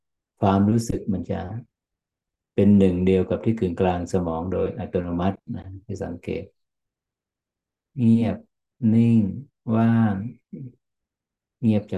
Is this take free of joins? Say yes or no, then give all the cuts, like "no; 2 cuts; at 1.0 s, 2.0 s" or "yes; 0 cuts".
yes; 0 cuts